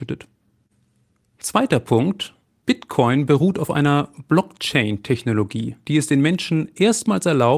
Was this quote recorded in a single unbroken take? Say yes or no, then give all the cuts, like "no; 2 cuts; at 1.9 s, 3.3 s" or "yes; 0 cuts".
yes; 0 cuts